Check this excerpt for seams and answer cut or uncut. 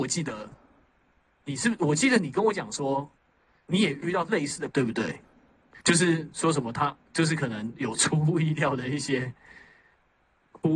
cut